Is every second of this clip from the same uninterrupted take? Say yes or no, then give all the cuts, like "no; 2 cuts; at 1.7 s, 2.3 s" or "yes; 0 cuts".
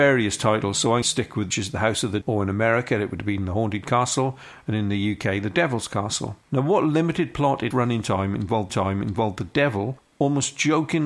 no; 6 cuts; at 1.0 s, 1.5 s, 2.2 s, 6.4 s, 7.7 s, 8.7 s